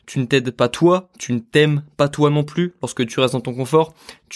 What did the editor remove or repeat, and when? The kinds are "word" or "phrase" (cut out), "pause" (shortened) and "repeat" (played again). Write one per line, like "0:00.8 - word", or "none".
none